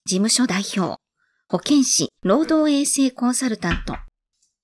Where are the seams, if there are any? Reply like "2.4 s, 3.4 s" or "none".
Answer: 2.2 s